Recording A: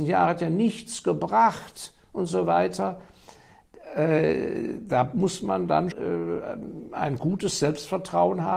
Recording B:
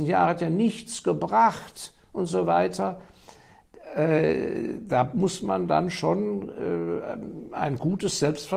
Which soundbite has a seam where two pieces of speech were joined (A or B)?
A